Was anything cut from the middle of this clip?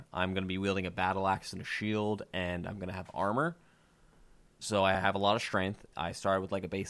no; 0 cuts

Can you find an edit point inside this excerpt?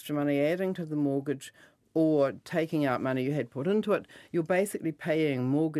no; 0 cuts

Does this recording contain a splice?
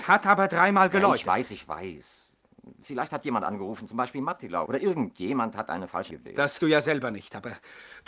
yes; 4 cuts; at 3.2 s, 4.6 s, 6.1 s, 6.6 s

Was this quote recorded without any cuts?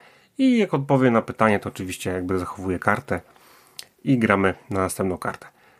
yes; 0 cuts

